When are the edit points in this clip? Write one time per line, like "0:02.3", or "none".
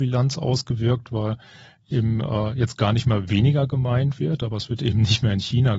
none